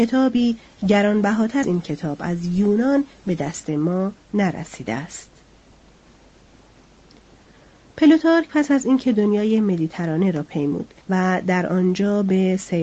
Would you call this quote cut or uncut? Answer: cut